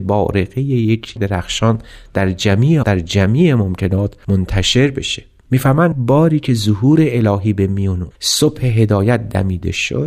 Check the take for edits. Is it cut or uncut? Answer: cut